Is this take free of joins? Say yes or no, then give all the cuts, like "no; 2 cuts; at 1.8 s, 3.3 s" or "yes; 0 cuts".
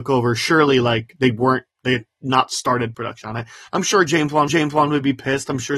no; 3 cuts; at 1.7 s, 2.9 s, 4.5 s